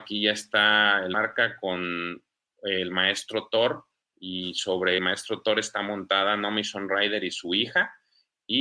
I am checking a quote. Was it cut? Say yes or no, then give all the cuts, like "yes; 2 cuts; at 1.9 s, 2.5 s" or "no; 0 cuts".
yes; 3 cuts; at 1.1 s, 4.0 s, 5.0 s